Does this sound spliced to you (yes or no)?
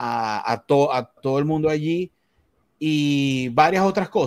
yes